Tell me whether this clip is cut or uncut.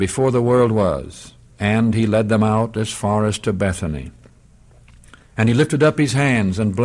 cut